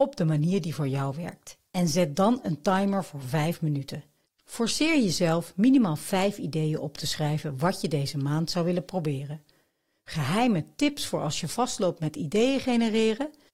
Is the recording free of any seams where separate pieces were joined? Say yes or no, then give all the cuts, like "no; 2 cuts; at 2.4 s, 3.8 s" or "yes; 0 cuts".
yes; 0 cuts